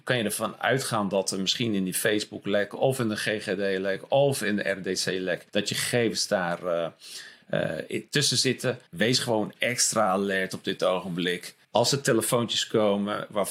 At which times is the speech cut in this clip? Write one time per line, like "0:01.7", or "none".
0:05.5
0:08.9
0:11.6